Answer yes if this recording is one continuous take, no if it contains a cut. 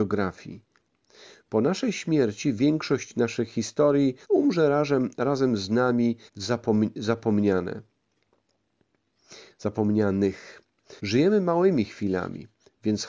no